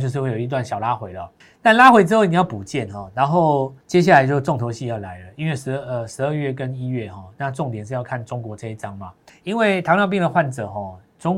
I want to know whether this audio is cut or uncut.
cut